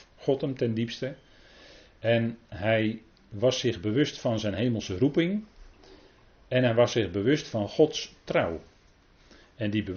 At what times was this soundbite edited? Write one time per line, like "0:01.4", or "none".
0:02.4